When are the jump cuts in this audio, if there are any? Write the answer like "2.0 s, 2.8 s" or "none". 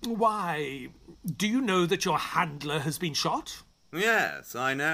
none